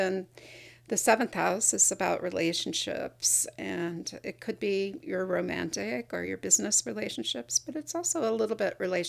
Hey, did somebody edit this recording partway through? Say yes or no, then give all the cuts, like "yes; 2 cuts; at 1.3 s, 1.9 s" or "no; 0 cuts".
no; 0 cuts